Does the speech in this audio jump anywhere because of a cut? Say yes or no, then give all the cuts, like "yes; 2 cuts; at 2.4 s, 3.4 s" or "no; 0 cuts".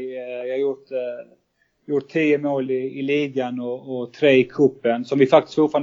no; 0 cuts